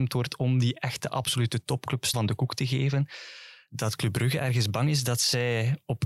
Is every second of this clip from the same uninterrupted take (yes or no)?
no